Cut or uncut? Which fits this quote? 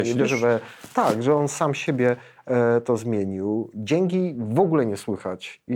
uncut